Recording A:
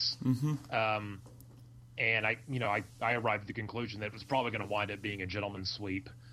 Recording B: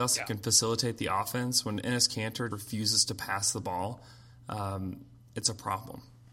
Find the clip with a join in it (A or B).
B